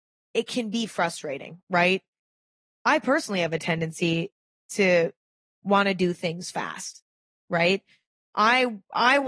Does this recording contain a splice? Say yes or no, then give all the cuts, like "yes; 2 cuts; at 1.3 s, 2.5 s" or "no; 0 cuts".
no; 0 cuts